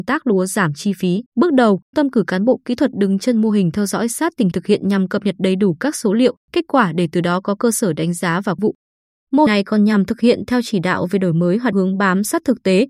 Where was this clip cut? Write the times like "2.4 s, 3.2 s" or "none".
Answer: 1.3 s, 1.9 s, 4.5 s, 6.4 s, 8.6 s, 9.5 s, 11.7 s